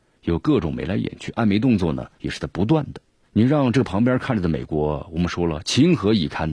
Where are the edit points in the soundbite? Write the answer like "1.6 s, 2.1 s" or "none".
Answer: 2.1 s, 3.2 s

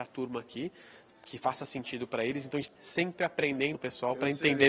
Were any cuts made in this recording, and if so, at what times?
2.8 s, 3.7 s

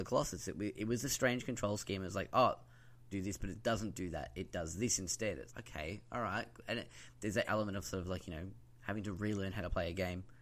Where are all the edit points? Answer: 3.1 s, 5.5 s, 7.5 s

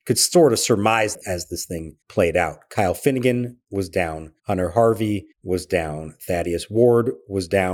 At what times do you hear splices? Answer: 2.0 s, 4.4 s, 5.3 s

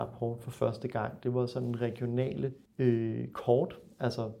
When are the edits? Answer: 2.7 s

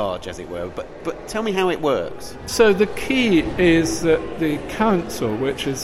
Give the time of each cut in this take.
none

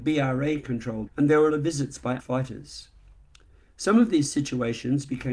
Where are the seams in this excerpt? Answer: 1.1 s, 1.5 s, 2.2 s

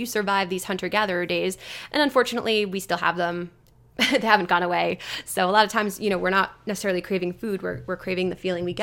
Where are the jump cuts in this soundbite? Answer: none

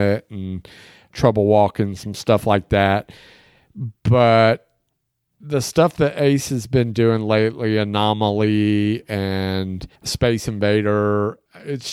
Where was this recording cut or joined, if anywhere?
10.0 s

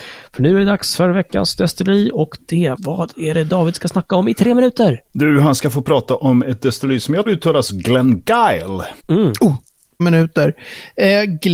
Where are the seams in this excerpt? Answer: 2.8 s, 7.3 s, 9.0 s, 10.0 s

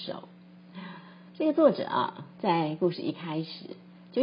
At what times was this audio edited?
1.3 s

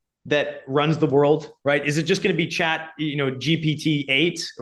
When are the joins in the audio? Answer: none

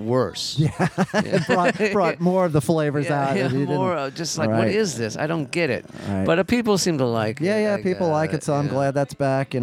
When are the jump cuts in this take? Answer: 4.4 s

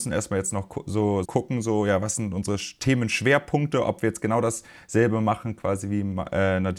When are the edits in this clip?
1.2 s

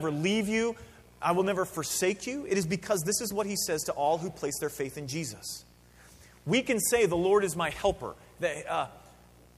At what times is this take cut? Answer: none

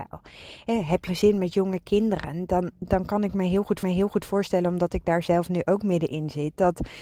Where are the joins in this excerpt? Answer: 1.1 s, 3.8 s

